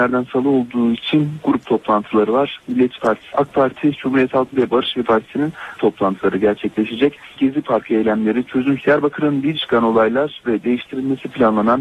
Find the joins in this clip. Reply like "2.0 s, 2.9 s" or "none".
3.0 s, 3.3 s, 4.5 s, 5.0 s, 5.8 s, 7.4 s, 8.8 s, 9.6 s